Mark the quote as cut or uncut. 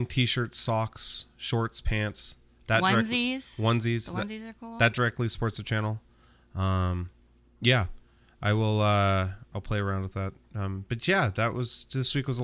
uncut